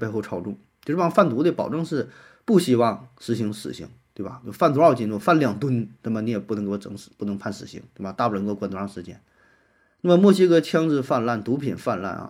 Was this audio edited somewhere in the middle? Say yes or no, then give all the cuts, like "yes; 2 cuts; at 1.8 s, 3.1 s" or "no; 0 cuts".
no; 0 cuts